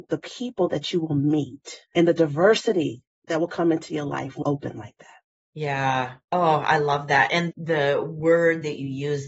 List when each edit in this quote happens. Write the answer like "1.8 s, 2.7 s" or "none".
1.9 s, 4.4 s, 7.5 s